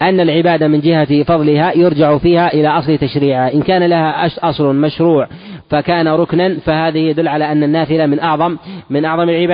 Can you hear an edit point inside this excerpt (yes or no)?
no